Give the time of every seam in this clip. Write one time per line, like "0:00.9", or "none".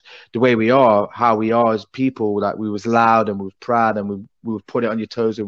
none